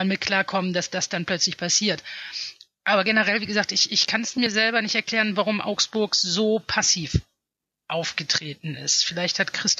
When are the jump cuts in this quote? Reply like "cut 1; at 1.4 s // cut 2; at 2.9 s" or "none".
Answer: none